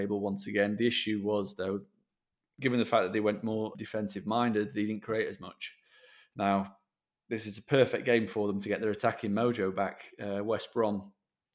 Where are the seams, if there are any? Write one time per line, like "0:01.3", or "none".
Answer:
0:03.7